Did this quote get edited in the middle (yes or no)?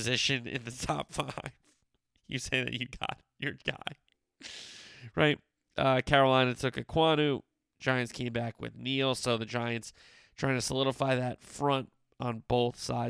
no